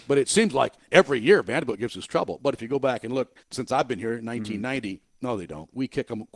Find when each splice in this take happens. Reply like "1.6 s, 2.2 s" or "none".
3.4 s